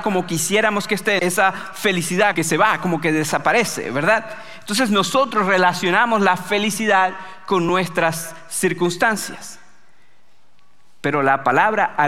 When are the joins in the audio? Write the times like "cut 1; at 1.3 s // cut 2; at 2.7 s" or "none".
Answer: cut 1; at 1.2 s // cut 2; at 2.3 s